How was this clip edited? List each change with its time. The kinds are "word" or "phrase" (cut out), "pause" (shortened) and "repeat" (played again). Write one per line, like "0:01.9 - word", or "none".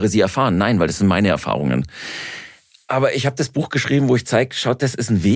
none